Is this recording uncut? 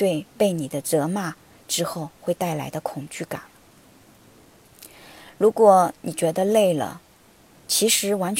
yes; 0 cuts

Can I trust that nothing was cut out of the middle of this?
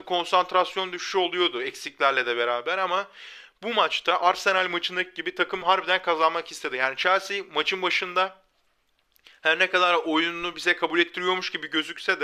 yes; 0 cuts

